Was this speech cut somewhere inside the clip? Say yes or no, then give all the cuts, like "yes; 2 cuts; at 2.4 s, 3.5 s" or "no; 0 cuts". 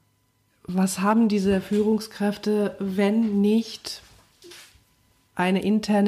no; 0 cuts